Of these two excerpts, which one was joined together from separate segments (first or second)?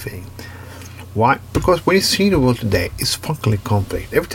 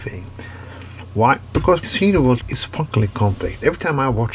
second